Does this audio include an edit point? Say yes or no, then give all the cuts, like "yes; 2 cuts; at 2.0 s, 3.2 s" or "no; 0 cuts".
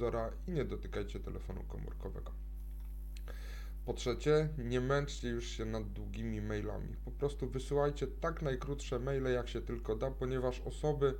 no; 0 cuts